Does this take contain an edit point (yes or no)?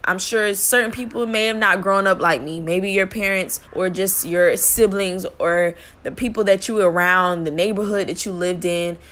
yes